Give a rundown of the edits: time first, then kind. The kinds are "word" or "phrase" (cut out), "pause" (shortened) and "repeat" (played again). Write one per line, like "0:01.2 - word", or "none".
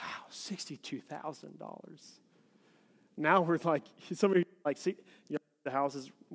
none